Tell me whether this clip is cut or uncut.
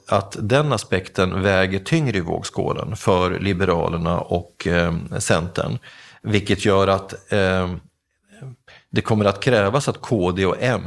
uncut